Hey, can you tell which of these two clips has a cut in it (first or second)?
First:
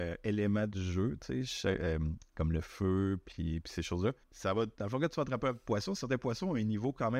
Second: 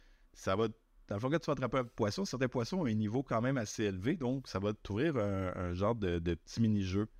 first